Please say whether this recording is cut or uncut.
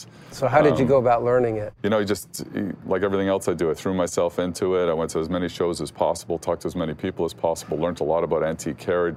uncut